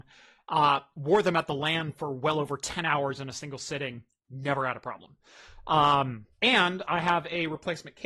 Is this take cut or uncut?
cut